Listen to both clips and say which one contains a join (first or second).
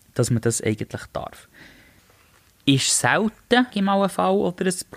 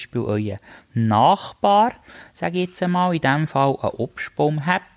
first